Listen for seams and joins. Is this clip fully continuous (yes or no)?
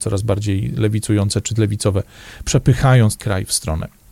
no